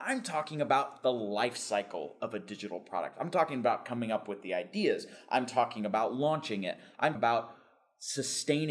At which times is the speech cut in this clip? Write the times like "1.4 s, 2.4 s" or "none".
7.1 s